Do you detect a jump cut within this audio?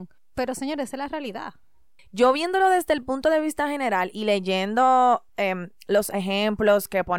no; 0 cuts

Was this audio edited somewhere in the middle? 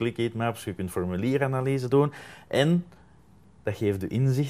no; 0 cuts

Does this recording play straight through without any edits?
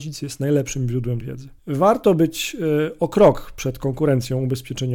no; 2 cuts; at 1.2 s, 1.6 s

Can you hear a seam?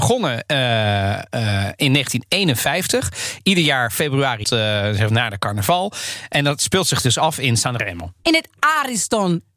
yes; 1 cut; at 4.4 s

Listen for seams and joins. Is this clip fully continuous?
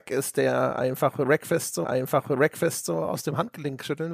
no; 1 cut; at 1.8 s

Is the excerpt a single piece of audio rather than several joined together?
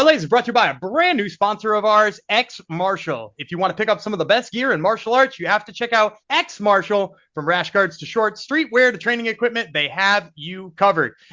no; 1 cut; at 6.2 s

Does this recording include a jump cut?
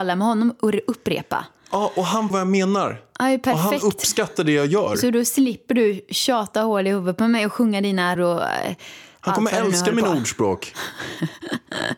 yes; 2 cuts; at 2.3 s, 8.2 s

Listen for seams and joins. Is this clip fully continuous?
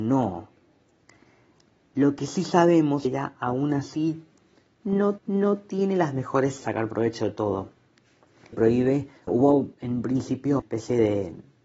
no; 7 cuts; at 3.0 s, 5.2 s, 6.6 s, 8.5 s, 9.3 s, 9.7 s, 10.6 s

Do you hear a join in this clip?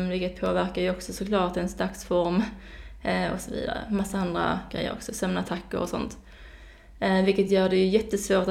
no; 0 cuts

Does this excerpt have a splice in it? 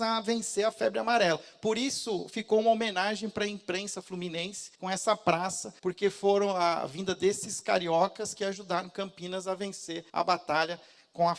yes; 3 cuts; at 4.7 s, 5.8 s, 10.1 s

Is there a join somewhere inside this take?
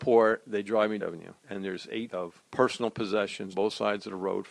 yes; 5 cuts; at 1.0 s, 1.4 s, 2.1 s, 2.5 s, 3.5 s

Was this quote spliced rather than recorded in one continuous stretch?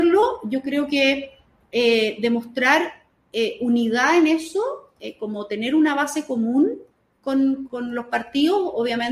yes; 1 cut; at 7.7 s

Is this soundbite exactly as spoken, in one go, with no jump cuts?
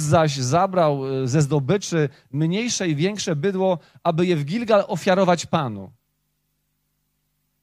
yes; 0 cuts

